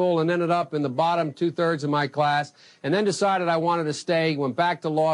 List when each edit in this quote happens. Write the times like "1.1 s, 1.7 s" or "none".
none